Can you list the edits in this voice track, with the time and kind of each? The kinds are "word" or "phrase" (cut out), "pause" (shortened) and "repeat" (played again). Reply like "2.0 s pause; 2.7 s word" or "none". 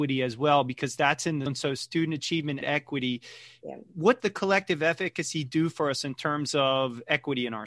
1.5 s word; 2.6 s word; 4.2 s word